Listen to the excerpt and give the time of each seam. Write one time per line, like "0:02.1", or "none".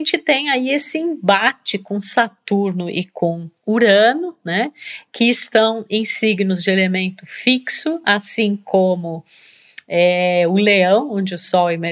none